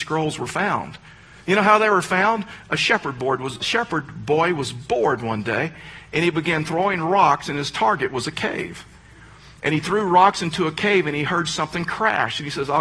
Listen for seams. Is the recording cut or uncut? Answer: cut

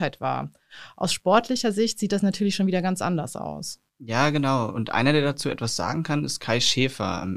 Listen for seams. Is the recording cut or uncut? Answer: cut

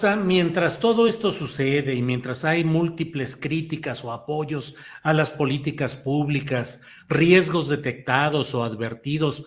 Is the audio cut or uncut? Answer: uncut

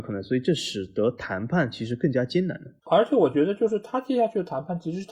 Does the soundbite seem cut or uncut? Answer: cut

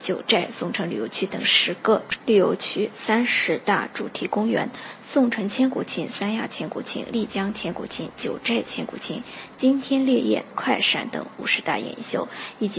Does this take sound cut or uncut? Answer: cut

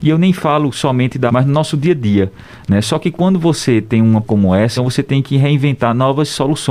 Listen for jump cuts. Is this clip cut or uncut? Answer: cut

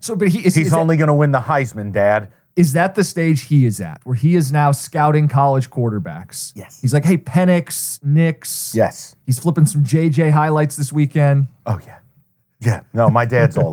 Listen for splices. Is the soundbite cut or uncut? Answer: uncut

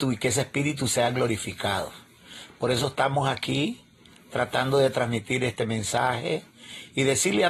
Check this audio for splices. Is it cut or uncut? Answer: uncut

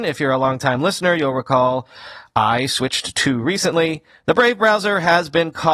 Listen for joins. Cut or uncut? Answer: cut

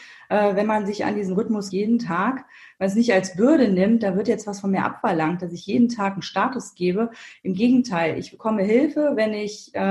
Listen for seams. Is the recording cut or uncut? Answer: cut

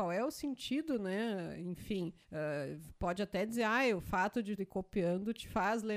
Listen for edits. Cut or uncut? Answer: cut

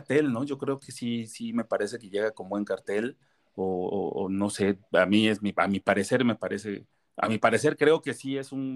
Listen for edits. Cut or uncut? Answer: uncut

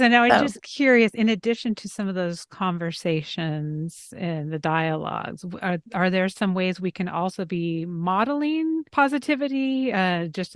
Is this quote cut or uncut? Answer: cut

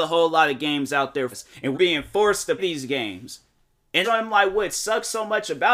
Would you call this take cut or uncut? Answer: cut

